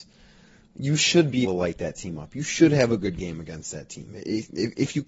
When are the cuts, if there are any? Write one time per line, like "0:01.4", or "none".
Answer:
0:01.4